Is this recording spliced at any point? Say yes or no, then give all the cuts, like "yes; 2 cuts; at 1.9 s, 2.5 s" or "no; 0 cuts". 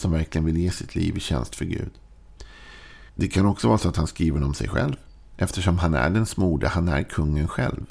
yes; 1 cut; at 3.1 s